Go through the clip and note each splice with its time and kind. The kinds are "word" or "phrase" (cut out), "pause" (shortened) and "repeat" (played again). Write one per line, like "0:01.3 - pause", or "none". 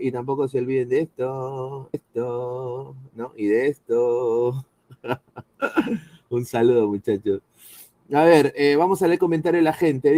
0:01.9 - phrase